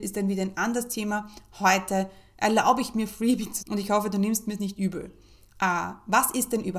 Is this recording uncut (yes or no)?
no